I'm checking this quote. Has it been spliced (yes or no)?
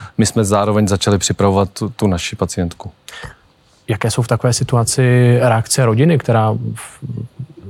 no